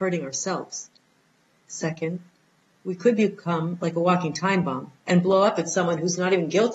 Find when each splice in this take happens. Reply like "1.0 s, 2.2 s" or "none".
none